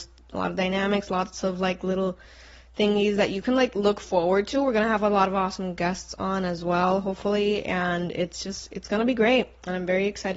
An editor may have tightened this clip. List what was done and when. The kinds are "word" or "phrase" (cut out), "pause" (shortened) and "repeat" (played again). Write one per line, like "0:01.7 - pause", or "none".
none